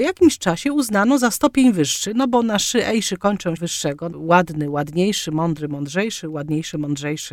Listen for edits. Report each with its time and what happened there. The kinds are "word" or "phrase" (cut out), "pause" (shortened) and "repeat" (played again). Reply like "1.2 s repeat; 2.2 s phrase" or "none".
3.6 s phrase; 4.1 s word